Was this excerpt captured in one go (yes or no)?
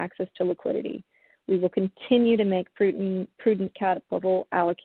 yes